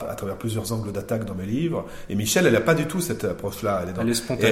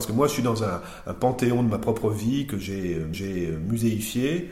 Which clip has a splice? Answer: second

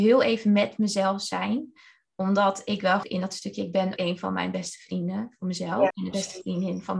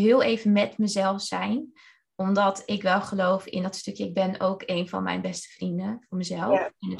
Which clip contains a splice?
first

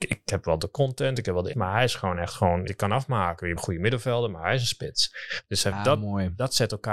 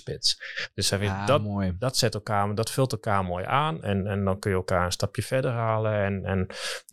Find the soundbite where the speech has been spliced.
first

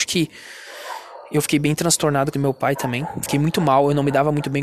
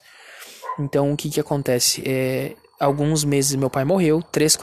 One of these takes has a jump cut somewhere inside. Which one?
first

